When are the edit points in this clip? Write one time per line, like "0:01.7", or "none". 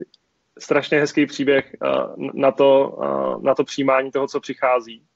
none